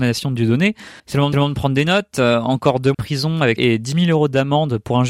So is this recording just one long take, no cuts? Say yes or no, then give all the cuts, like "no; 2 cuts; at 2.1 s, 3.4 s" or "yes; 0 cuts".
no; 4 cuts; at 1.0 s, 1.3 s, 2.9 s, 3.6 s